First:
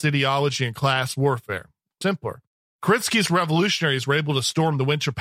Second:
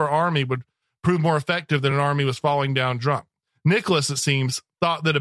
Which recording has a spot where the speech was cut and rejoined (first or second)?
first